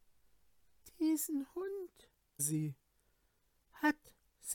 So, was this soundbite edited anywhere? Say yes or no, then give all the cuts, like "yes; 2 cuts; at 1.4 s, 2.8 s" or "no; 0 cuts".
yes; 1 cut; at 2.4 s